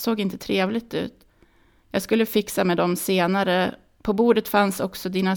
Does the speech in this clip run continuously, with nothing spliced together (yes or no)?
yes